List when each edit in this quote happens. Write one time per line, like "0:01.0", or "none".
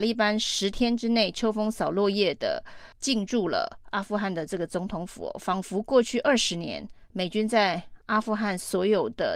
0:02.9
0:07.0